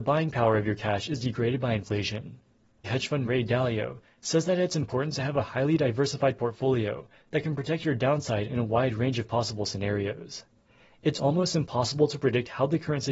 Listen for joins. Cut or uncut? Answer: cut